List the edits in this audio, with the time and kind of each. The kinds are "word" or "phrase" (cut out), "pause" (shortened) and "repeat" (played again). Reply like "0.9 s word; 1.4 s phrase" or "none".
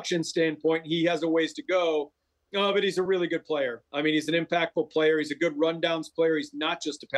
none